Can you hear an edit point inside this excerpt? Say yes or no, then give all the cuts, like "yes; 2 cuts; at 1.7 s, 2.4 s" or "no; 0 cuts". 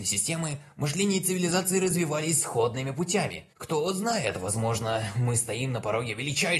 yes; 1 cut; at 3.5 s